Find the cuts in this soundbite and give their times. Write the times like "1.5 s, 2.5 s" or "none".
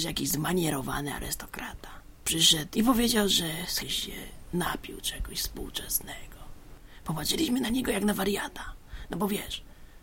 2.7 s, 3.8 s